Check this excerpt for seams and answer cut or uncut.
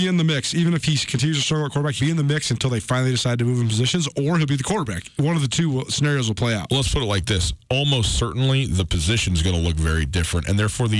cut